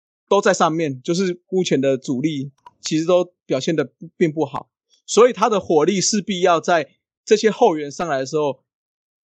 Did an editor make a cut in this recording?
no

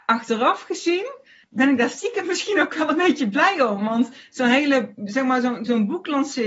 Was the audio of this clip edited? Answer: no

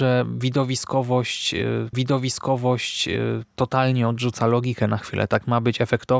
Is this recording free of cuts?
no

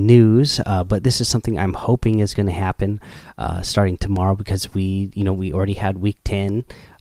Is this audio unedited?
yes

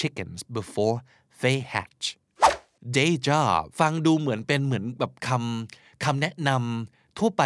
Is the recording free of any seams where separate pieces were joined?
no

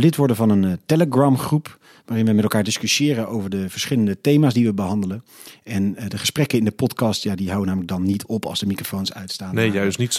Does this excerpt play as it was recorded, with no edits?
yes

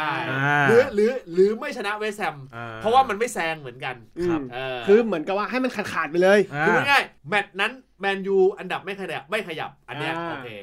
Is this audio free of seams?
no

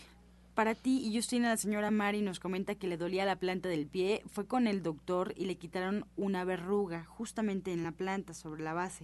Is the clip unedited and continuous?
yes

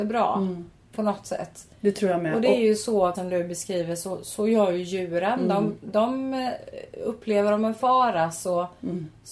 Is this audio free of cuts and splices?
no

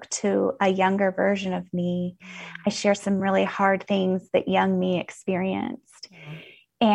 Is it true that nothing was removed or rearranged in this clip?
yes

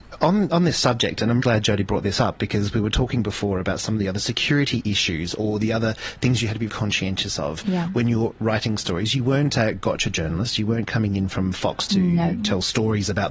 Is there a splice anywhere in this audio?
yes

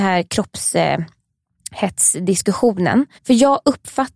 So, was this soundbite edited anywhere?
yes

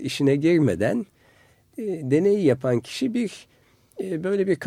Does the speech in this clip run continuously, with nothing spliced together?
yes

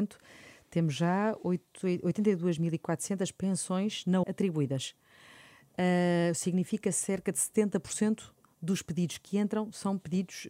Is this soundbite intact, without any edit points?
no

